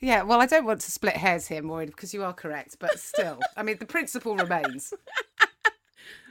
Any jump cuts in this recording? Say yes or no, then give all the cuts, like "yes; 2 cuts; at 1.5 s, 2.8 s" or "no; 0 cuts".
no; 0 cuts